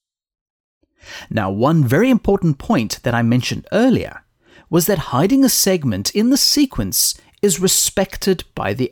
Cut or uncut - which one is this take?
uncut